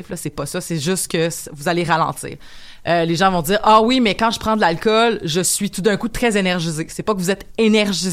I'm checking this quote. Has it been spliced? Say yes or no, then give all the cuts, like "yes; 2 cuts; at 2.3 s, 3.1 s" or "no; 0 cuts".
no; 0 cuts